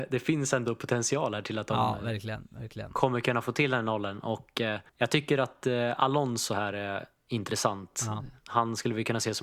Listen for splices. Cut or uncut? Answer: cut